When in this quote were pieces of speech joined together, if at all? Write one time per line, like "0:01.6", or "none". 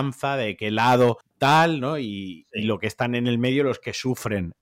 0:01.2

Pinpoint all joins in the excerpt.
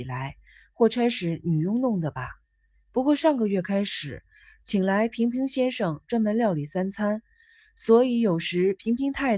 none

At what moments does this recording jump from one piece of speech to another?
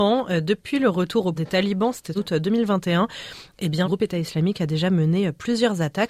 0:01.4
0:02.2
0:03.8

